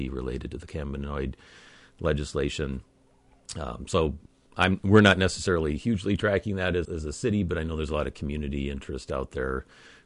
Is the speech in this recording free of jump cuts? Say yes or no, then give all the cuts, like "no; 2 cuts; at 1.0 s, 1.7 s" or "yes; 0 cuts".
no; 1 cut; at 6.8 s